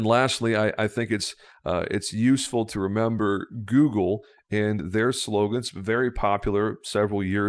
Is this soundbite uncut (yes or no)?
yes